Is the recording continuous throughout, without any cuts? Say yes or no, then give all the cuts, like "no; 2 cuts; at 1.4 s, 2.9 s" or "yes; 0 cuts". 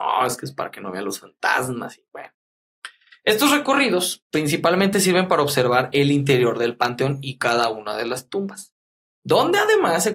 yes; 0 cuts